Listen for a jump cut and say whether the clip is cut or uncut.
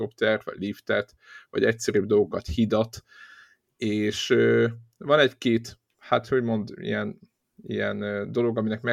uncut